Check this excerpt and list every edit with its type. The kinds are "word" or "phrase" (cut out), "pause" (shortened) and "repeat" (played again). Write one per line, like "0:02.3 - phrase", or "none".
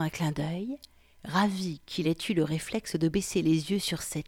none

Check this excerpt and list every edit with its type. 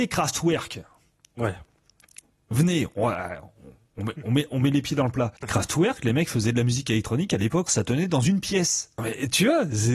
0:04.2 - word
0:05.4 - pause
0:07.7 - phrase

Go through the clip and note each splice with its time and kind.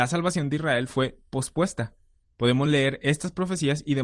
none

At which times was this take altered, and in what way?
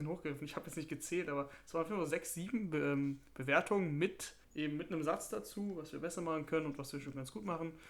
0:04.4 - pause

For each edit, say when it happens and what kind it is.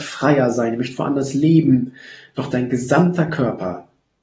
none

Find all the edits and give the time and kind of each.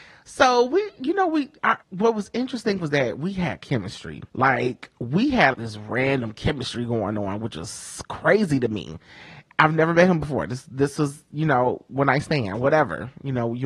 0:01.8 - pause
0:04.3 - pause
0:05.5 - word

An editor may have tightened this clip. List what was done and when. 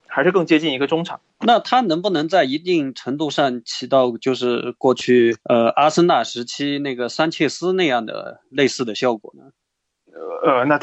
0:01.3 - pause
0:05.4 - pause

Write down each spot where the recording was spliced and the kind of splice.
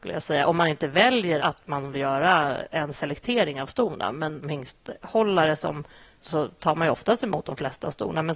0:01.4 - word
0:01.9 - word
0:04.4 - word
0:06.2 - phrase

